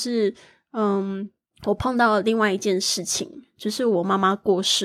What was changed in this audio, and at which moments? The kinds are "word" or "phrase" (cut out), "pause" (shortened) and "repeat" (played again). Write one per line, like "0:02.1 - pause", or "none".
0:01.5 - pause